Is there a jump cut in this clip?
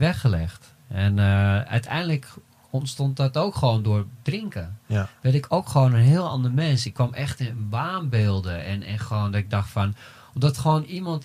no; 0 cuts

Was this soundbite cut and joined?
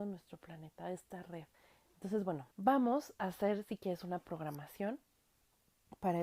yes; 2 cuts; at 1.5 s, 2.5 s

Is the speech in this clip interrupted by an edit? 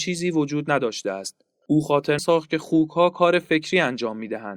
yes; 1 cut; at 2.2 s

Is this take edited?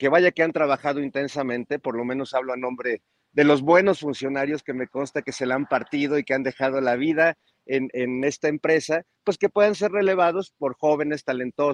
no; 0 cuts

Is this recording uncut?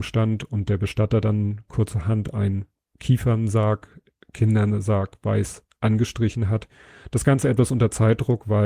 yes; 0 cuts

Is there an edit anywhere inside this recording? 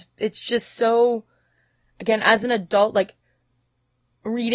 no; 0 cuts

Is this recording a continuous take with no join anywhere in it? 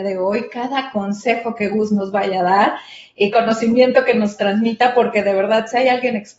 no; 1 cut; at 3.3 s

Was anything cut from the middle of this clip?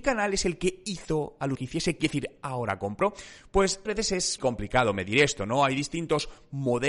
yes; 4 cuts; at 1.5 s, 2.0 s, 3.9 s, 4.4 s

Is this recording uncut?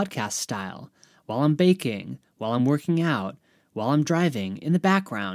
yes; 0 cuts

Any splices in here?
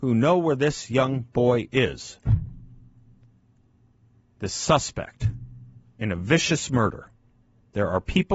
yes; 1 cut; at 5.8 s

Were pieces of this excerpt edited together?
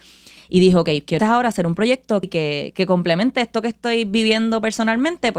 yes; 2 cuts; at 1.2 s, 2.2 s

